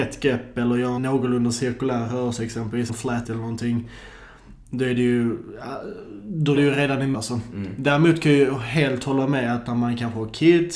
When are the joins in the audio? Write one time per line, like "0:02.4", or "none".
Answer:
0:01.0
0:02.9
0:03.2
0:06.5
0:07.1